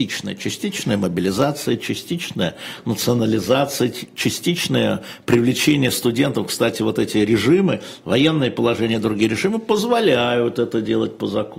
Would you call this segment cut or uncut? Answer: uncut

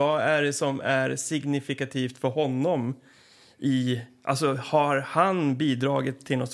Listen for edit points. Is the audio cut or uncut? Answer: uncut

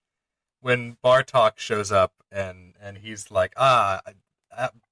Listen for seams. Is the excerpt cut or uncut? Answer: uncut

